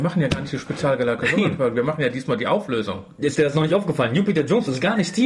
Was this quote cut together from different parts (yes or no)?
no